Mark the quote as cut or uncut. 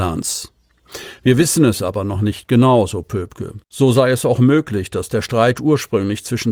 cut